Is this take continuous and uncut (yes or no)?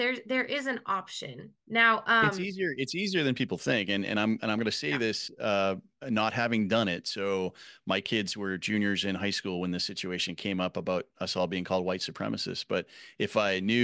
no